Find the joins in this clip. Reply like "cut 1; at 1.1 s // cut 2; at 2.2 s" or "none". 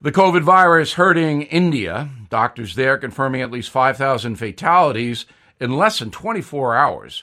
none